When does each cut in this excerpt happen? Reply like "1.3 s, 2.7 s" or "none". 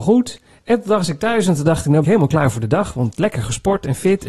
2.0 s